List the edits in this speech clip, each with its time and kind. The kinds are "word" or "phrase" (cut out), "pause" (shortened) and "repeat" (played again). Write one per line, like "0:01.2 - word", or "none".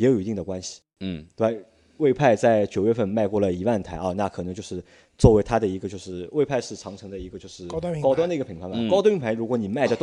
none